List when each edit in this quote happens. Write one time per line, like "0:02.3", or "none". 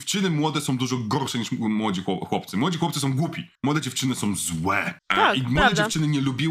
0:03.6
0:05.0